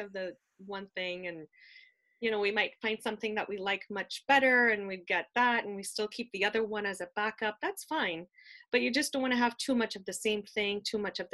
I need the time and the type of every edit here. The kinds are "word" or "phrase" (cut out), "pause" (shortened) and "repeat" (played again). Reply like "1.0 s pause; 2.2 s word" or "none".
none